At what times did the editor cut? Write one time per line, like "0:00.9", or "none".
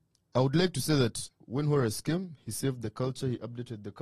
0:01.4